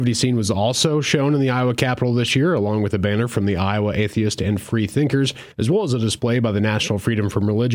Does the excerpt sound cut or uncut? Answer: cut